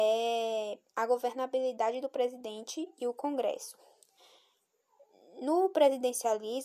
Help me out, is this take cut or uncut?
uncut